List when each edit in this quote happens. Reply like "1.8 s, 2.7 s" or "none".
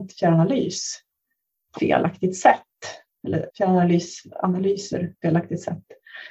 1.8 s, 3.5 s, 5.2 s